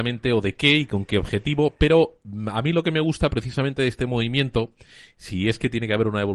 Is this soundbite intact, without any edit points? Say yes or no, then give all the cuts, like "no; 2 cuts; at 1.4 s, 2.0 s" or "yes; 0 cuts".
yes; 0 cuts